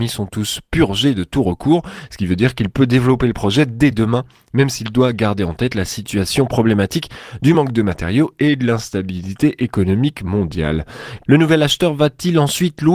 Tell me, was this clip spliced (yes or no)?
no